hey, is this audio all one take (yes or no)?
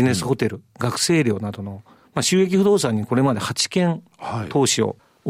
yes